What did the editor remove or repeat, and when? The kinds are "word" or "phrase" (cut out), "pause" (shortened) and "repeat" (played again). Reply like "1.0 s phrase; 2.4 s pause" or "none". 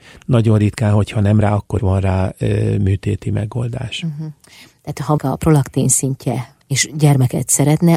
1.4 s word; 1.8 s word; 5.2 s word; 6.6 s word